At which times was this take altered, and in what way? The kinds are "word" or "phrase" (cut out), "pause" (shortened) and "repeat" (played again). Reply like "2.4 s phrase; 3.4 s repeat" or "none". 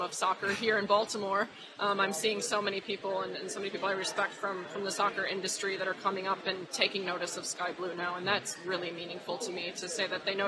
none